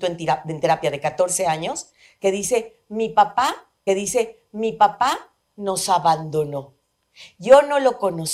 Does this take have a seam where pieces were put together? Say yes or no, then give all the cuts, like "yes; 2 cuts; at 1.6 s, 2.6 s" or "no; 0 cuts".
yes; 1 cut; at 3.9 s